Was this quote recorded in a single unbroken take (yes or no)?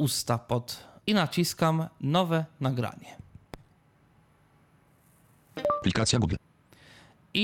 no